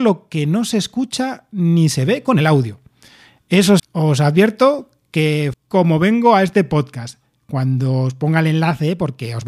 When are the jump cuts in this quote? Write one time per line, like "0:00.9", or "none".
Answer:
0:03.8
0:05.5